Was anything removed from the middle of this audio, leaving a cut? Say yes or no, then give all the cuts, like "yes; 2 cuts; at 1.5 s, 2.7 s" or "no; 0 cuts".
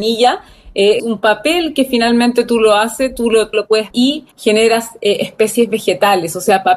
yes; 4 cuts; at 1.0 s, 3.5 s, 3.9 s, 4.3 s